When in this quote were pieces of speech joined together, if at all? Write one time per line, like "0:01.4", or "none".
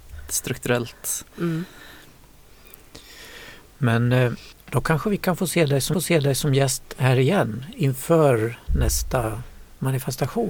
0:04.5
0:05.9